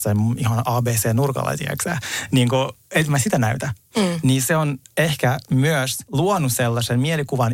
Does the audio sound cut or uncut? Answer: uncut